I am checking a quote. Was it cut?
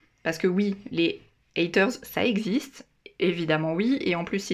no; 0 cuts

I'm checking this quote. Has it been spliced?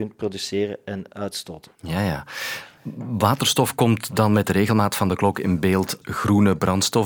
yes; 2 cuts; at 1.7 s, 6.0 s

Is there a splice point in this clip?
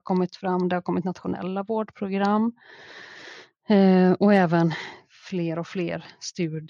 no; 0 cuts

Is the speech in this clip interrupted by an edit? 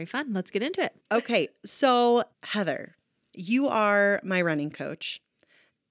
yes; 2 cuts; at 1.0 s, 2.3 s

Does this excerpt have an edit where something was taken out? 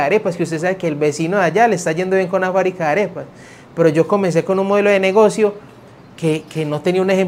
no; 0 cuts

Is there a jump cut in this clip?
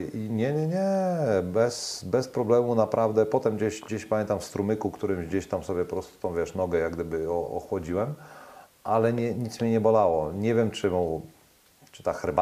no; 0 cuts

